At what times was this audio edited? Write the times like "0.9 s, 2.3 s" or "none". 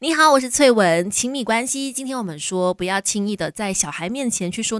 1.1 s